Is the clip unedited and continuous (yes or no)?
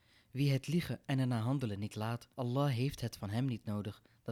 no